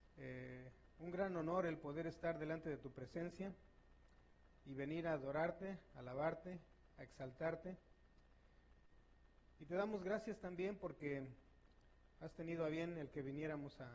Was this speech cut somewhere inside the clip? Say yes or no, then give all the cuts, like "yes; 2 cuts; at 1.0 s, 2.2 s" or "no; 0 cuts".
no; 0 cuts